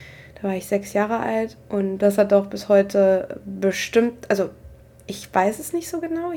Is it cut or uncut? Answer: uncut